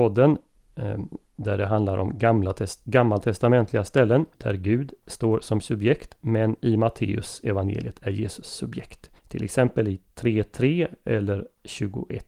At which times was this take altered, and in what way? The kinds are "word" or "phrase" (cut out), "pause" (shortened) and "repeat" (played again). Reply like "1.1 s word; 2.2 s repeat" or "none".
4.3 s pause; 9.2 s pause; 10.1 s pause